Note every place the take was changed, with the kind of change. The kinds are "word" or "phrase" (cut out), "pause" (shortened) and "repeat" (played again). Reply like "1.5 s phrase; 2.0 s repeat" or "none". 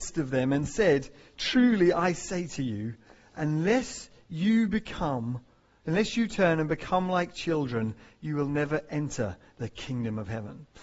none